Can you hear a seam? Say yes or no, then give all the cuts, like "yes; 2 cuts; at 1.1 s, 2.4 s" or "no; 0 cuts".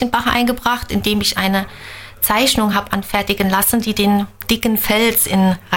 no; 0 cuts